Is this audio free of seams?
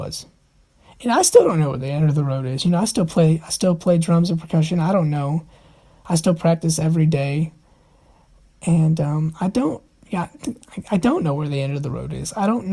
yes; 0 cuts

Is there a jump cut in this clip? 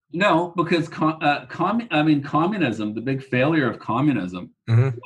no; 0 cuts

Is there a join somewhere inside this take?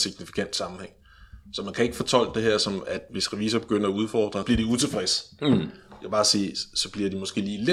yes; 1 cut; at 4.4 s

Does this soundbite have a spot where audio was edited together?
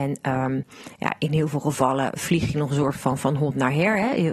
no; 0 cuts

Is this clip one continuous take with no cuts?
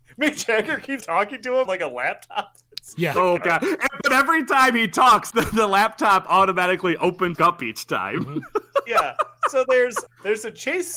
no; 6 cuts; at 1.0 s, 1.7 s, 3.4 s, 5.3 s, 7.4 s, 10.1 s

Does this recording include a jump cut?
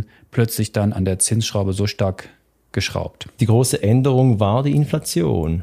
no; 0 cuts

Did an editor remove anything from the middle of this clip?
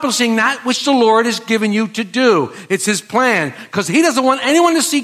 no; 0 cuts

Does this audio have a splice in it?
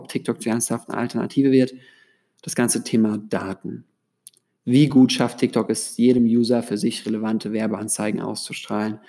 no; 0 cuts

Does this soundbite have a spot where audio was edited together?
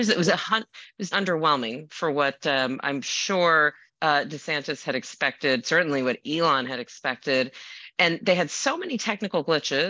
yes; 2 cuts; at 1.1 s, 3.9 s

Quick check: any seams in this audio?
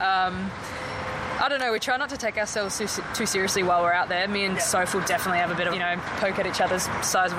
yes; 1 cut; at 5.7 s

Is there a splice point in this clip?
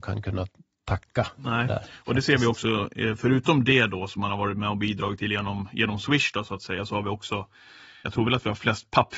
yes; 1 cut; at 8.0 s

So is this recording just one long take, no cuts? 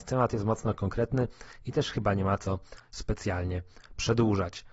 yes; 0 cuts

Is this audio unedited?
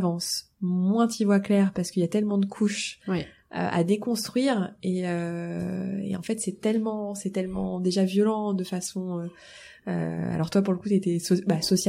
yes; 0 cuts

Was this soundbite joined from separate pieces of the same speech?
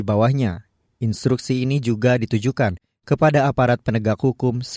no; 0 cuts

